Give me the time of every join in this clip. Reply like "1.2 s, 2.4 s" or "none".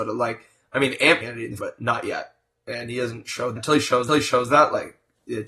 1.2 s, 1.6 s, 3.6 s, 4.1 s